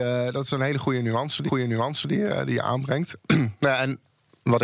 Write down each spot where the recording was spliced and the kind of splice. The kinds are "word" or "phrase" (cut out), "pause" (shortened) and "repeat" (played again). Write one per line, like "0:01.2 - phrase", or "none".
0:01.5 - repeat